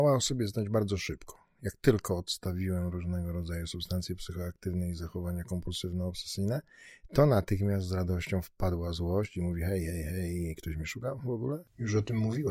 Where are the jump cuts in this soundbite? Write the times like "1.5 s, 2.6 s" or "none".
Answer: none